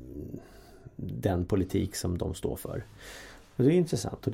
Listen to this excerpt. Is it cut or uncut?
uncut